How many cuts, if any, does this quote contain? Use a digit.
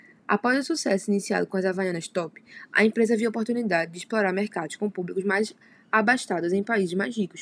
0